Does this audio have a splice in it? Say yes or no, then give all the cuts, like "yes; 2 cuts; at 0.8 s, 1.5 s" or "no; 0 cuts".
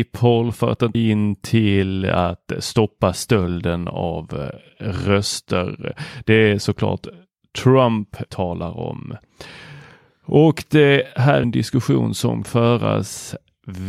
yes; 4 cuts; at 0.9 s, 8.3 s, 11.4 s, 12.4 s